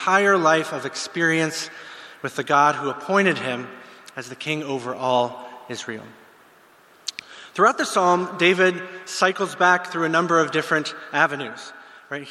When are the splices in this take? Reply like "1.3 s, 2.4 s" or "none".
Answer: none